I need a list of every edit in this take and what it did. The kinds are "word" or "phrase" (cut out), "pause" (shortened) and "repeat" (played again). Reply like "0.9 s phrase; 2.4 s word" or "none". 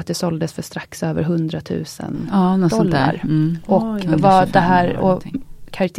none